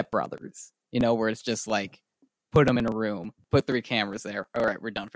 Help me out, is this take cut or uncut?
uncut